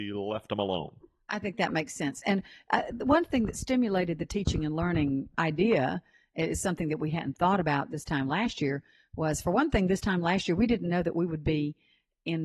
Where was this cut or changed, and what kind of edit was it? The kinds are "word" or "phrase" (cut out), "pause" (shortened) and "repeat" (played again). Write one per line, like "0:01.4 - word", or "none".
none